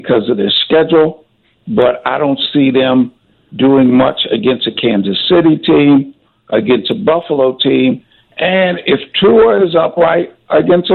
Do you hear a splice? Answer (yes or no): no